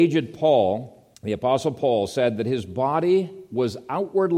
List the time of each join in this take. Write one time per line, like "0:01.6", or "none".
0:01.1